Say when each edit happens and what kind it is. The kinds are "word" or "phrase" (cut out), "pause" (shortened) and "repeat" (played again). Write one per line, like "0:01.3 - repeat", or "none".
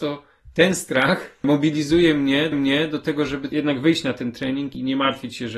0:02.5 - repeat